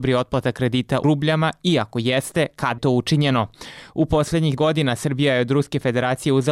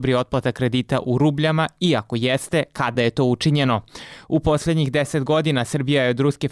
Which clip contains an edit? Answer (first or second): first